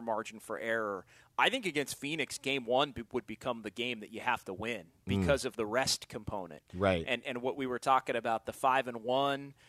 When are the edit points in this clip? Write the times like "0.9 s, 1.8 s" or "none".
none